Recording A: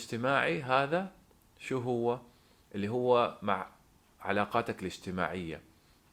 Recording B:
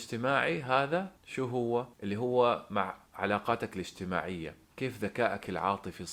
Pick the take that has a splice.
B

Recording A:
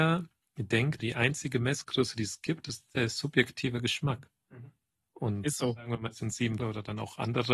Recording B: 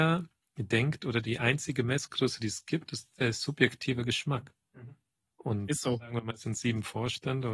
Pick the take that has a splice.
A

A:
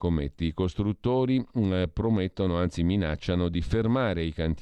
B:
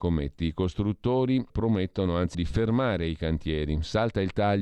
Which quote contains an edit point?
B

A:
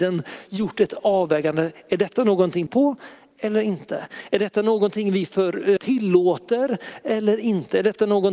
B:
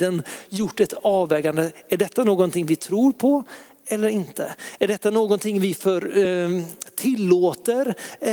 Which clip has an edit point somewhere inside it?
A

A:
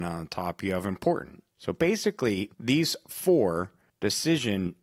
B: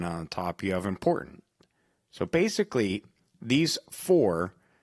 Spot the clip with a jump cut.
A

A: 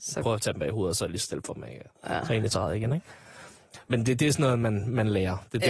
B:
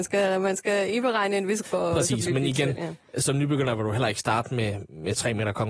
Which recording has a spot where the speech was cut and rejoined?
B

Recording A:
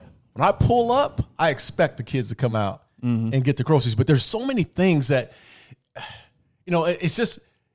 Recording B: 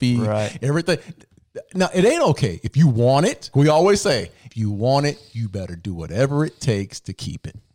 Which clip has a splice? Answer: B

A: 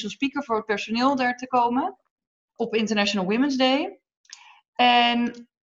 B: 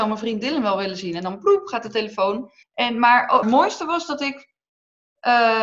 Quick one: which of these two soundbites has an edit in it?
B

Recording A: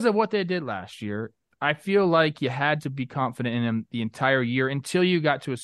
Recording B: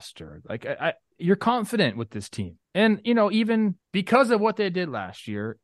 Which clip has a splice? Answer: B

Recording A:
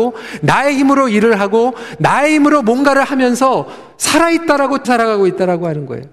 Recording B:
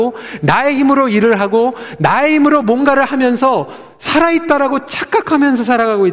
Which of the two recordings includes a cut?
A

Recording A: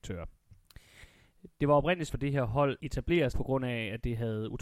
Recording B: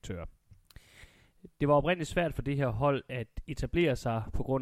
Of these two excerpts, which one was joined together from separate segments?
A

